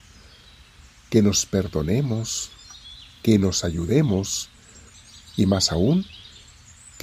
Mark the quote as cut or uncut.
uncut